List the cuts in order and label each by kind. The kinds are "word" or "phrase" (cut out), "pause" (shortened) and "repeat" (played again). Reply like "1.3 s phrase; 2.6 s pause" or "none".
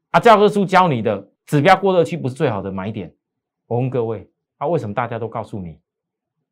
1.4 s pause; 3.2 s pause